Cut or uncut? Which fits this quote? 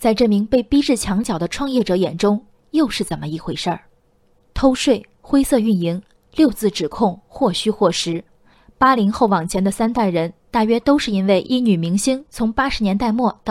uncut